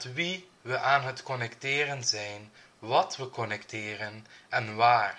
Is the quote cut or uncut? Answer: uncut